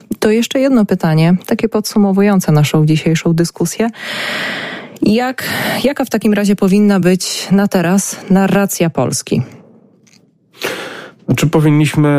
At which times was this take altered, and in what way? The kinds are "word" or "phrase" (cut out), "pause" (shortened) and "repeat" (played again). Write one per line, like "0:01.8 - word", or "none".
none